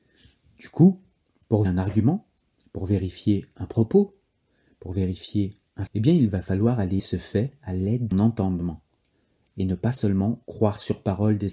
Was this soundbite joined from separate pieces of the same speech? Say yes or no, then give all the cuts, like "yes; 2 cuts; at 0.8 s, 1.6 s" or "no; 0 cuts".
yes; 4 cuts; at 1.6 s, 5.9 s, 7.0 s, 8.1 s